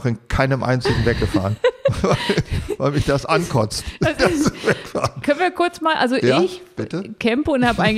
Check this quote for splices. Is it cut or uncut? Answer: uncut